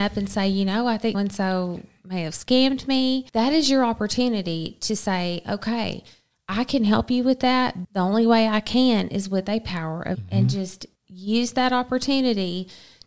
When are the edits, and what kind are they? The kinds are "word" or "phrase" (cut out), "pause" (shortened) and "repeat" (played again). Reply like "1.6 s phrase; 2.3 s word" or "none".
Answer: 1.1 s word; 3.3 s pause; 7.8 s word; 10.1 s word; 11.0 s pause